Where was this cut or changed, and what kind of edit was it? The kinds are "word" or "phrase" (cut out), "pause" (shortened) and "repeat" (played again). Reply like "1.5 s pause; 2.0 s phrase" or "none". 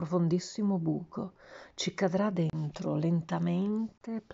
none